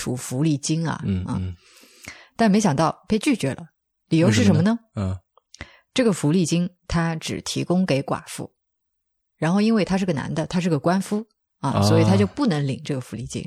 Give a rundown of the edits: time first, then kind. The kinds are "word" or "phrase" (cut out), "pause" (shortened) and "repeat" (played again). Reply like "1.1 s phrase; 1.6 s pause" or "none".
4.0 s word